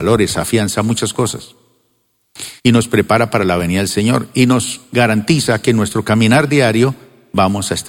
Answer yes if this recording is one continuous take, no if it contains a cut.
no